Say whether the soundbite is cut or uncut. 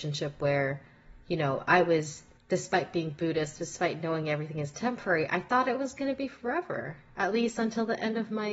cut